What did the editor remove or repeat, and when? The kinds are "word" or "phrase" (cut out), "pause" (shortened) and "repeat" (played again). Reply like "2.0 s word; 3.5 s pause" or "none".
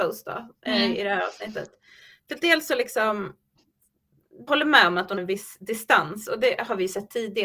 4.5 s word; 5.2 s word